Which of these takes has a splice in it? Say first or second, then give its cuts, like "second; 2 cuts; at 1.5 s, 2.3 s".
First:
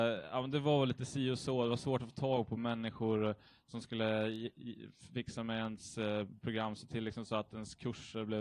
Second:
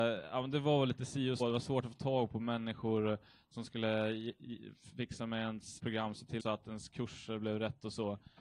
second; 3 cuts; at 1.4 s, 5.8 s, 6.4 s